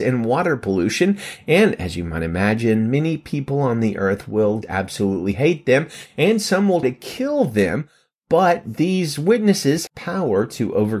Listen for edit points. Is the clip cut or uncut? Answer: cut